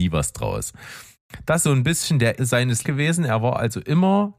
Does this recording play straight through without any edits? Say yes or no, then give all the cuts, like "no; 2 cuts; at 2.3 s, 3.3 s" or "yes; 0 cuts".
no; 3 cuts; at 1.6 s, 2.4 s, 2.8 s